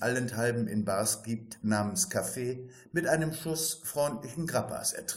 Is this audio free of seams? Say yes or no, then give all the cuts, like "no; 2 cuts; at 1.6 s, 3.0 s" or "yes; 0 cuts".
yes; 0 cuts